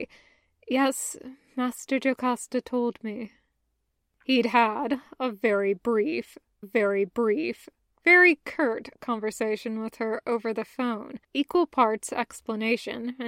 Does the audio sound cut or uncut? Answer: cut